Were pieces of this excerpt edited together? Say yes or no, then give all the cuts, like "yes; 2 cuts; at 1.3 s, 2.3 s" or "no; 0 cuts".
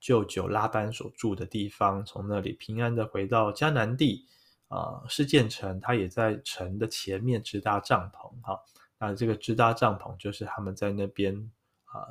no; 0 cuts